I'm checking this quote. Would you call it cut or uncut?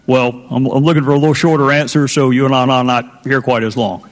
cut